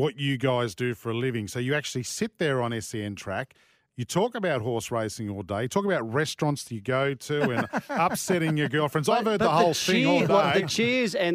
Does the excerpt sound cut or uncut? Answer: uncut